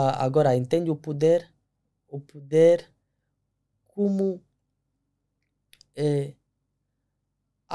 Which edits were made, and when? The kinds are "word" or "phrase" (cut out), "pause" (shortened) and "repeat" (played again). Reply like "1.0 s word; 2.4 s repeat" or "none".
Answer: none